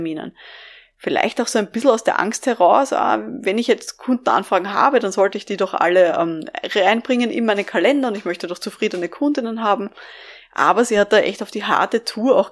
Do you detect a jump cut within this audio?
no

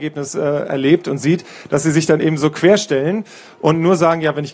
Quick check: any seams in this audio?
no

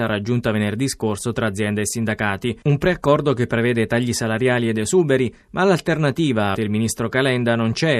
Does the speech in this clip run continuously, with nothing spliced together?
no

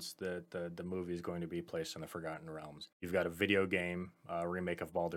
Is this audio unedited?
no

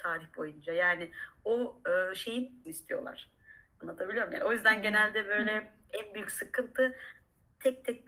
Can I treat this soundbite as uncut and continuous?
no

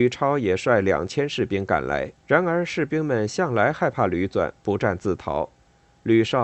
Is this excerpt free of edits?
no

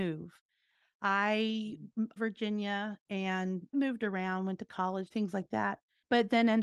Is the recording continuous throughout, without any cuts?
no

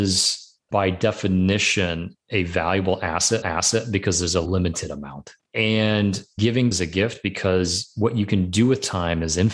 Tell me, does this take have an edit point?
yes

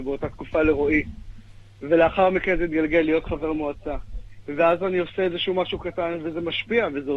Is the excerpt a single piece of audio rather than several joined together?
yes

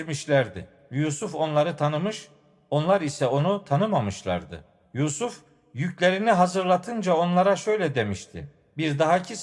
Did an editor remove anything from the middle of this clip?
no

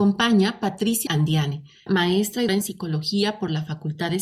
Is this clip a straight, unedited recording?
no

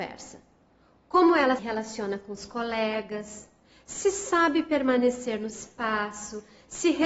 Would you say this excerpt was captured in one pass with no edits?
no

